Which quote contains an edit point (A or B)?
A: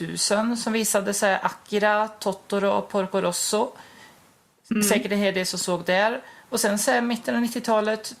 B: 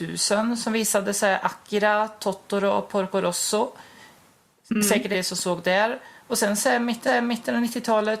B